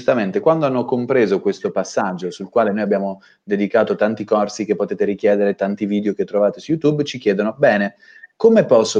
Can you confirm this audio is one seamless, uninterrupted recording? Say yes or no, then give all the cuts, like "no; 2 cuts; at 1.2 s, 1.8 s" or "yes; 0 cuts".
yes; 0 cuts